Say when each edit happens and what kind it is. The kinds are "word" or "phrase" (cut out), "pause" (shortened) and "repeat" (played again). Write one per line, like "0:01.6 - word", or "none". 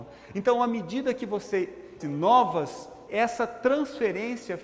0:02.0 - word
0:03.1 - word